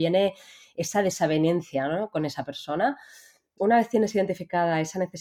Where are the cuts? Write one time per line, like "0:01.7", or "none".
0:03.6